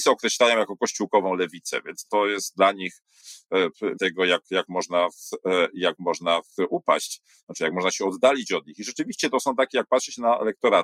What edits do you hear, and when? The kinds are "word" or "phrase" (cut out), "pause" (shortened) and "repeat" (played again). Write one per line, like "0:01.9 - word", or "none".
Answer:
0:02.1 - word
0:03.9 - word